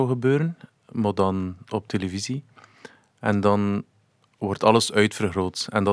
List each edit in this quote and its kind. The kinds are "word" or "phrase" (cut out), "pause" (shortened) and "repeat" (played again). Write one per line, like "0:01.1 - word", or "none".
none